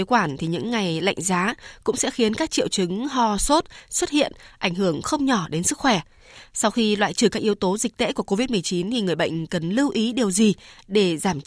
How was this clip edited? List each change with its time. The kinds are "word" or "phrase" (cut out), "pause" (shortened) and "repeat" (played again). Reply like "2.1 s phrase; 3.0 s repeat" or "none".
none